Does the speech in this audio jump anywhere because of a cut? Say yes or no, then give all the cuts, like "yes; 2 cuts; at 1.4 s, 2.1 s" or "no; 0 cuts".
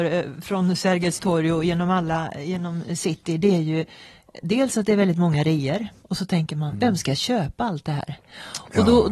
no; 0 cuts